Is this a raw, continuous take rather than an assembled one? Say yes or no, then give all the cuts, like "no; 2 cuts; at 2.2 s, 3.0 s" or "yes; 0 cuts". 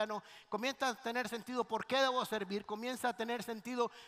yes; 0 cuts